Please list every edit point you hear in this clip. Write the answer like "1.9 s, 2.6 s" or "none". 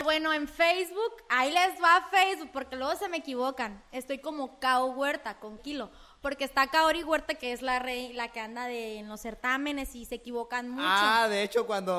5.6 s